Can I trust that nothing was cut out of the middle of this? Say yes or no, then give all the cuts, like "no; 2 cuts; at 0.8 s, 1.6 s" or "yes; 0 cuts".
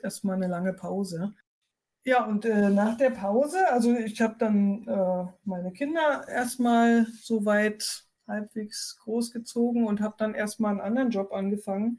yes; 0 cuts